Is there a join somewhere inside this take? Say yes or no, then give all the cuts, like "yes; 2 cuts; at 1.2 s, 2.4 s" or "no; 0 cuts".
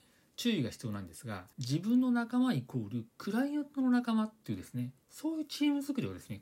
yes; 1 cut; at 1.5 s